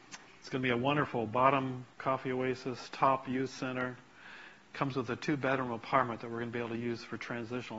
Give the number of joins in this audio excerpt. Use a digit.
1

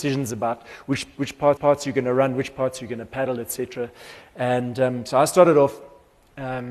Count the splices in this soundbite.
1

